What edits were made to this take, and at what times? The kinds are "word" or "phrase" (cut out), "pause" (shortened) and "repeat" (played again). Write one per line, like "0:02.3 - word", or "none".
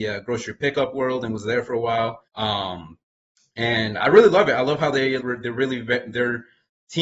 0:02.3 - pause
0:05.2 - word